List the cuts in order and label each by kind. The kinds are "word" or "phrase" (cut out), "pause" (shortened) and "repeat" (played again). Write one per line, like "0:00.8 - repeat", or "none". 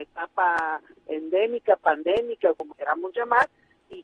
0:02.7 - word